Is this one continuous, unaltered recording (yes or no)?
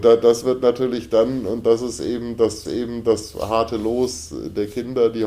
no